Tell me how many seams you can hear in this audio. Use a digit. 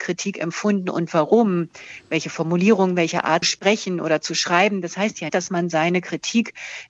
2